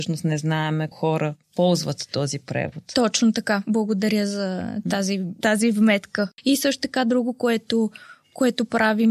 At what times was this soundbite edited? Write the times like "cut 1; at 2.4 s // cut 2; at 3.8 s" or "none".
cut 1; at 0.9 s // cut 2; at 1.4 s // cut 3; at 5.4 s